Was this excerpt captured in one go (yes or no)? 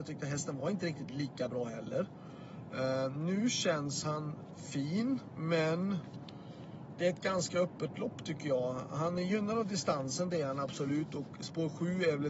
yes